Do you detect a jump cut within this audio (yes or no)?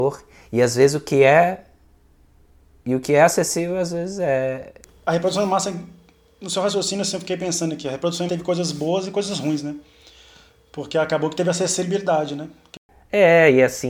yes